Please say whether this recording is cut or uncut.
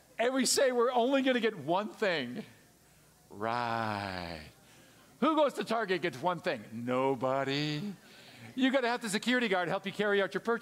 uncut